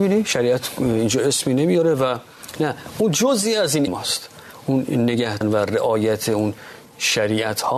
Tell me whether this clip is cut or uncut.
cut